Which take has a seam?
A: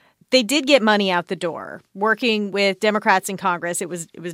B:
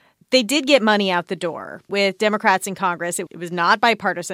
B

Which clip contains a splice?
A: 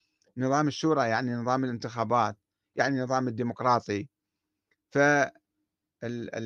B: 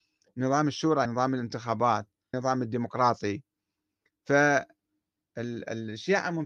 B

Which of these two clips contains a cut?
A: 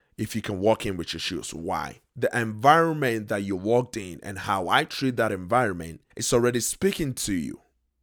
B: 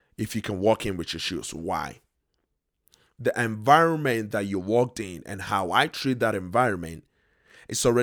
A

